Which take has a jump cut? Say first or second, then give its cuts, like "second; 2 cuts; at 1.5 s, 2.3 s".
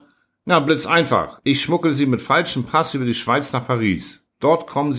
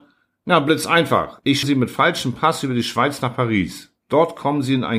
second; 1 cut; at 1.6 s